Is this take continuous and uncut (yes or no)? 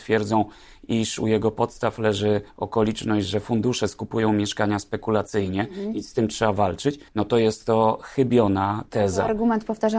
no